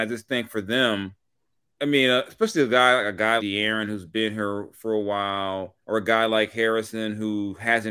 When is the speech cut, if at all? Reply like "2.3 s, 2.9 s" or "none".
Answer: 1.6 s, 3.4 s, 5.8 s